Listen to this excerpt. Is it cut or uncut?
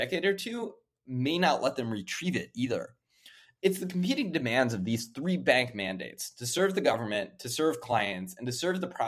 uncut